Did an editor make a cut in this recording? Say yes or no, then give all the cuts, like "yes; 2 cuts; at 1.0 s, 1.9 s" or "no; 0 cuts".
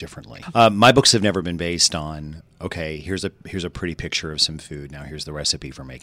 no; 0 cuts